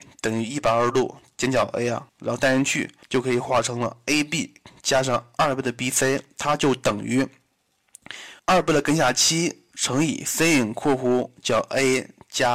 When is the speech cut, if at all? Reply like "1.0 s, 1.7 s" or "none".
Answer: 2.1 s, 3.0 s, 8.4 s